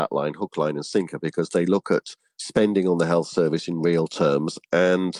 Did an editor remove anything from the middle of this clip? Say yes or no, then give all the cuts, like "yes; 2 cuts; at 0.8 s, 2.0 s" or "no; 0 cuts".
no; 0 cuts